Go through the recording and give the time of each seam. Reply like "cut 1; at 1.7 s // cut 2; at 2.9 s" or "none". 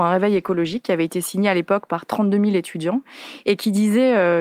none